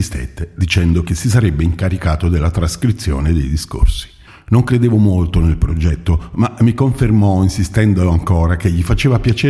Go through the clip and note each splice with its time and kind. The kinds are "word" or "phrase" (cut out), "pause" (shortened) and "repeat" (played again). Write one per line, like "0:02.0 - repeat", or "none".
0:04.3 - pause